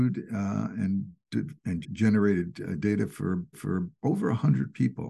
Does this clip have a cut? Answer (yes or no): yes